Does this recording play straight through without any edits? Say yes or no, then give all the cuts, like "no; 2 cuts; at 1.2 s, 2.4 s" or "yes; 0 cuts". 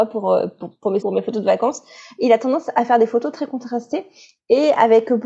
no; 2 cuts; at 1.0 s, 3.3 s